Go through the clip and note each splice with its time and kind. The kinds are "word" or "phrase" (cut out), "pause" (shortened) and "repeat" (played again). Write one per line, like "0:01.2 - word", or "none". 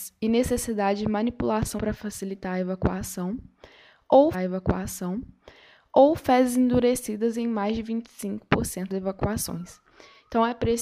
0:01.8 - word
0:04.3 - repeat
0:08.9 - word